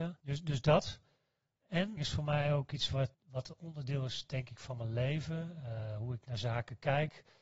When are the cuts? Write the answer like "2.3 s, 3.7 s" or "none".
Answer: 2.0 s, 3.1 s